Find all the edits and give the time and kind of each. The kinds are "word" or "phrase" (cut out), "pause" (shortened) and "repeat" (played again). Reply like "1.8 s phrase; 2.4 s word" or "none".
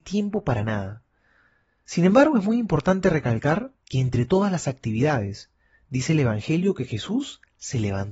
3.8 s pause